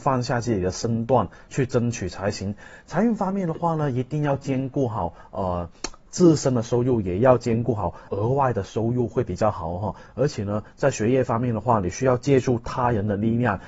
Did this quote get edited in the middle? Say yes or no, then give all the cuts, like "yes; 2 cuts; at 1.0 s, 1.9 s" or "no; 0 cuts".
yes; 1 cut; at 8.1 s